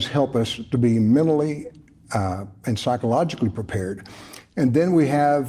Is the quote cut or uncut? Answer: uncut